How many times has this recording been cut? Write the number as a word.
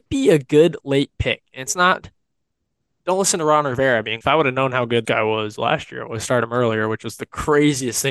two